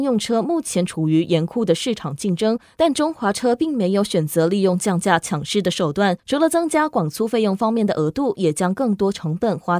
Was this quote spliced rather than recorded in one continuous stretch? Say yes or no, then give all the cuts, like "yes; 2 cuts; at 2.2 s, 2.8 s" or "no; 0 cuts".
yes; 1 cut; at 6.2 s